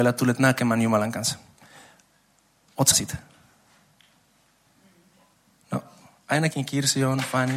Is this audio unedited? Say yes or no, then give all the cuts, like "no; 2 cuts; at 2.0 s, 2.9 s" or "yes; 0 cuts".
no; 1 cut; at 2.9 s